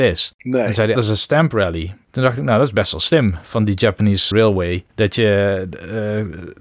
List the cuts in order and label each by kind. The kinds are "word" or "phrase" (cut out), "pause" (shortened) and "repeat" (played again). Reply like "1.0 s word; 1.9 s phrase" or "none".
1.0 s word; 4.3 s word